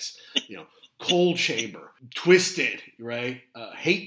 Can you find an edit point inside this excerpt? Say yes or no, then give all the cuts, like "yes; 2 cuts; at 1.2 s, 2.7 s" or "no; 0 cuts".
no; 0 cuts